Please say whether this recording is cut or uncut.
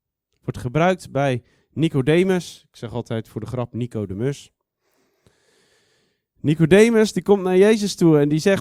uncut